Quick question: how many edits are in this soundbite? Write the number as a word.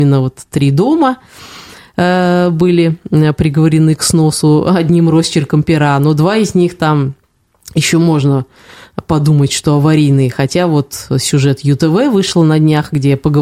zero